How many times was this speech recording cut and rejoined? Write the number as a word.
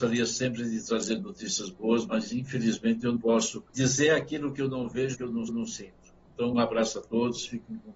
five